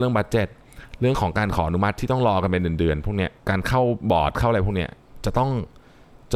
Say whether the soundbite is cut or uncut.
cut